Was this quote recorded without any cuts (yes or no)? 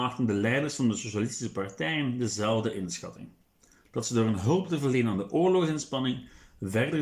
yes